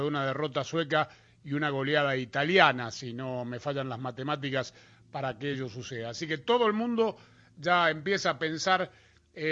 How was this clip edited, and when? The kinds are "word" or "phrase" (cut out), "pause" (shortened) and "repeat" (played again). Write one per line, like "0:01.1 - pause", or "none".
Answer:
none